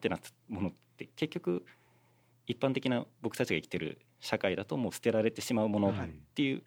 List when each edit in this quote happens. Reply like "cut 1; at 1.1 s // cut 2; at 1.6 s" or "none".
none